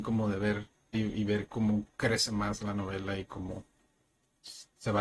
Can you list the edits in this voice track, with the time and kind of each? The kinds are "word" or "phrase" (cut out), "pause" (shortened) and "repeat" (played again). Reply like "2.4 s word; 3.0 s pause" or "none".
0.9 s word